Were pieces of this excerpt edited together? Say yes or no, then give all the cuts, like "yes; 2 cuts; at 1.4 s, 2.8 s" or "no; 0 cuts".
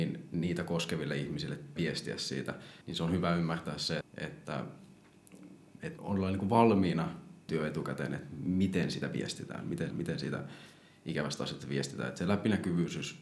yes; 6 cuts; at 1.8 s, 2.8 s, 4.0 s, 6.0 s, 7.5 s, 9.9 s